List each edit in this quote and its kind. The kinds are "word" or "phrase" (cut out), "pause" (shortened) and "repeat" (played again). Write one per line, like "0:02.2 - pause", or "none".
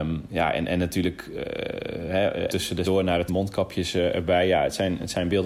0:02.5 - word
0:02.8 - word
0:03.3 - word